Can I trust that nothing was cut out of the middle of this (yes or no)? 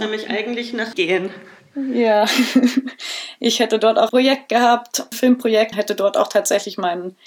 no